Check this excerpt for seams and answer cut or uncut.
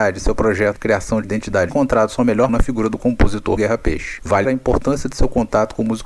cut